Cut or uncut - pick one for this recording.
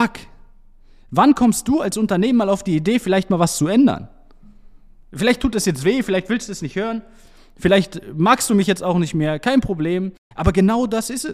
uncut